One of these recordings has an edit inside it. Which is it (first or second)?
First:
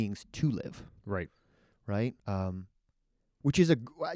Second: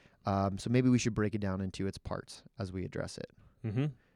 first